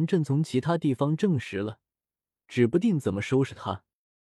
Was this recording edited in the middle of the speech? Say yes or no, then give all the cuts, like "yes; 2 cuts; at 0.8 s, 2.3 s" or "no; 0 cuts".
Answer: no; 0 cuts